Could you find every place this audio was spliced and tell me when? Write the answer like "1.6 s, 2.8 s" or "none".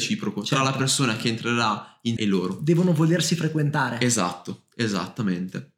2.2 s